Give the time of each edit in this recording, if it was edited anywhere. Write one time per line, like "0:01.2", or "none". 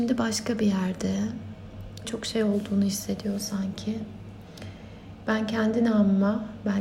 0:02.0